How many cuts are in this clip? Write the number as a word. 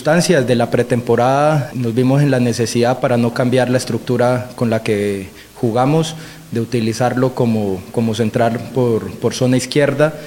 one